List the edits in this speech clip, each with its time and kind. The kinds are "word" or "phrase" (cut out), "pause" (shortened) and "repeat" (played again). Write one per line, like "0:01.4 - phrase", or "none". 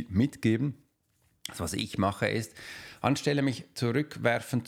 none